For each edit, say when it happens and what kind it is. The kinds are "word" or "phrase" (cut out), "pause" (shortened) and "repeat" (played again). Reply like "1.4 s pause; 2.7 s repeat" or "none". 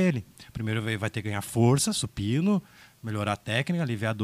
none